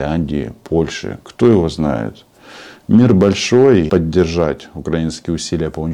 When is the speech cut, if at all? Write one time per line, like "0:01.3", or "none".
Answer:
0:03.9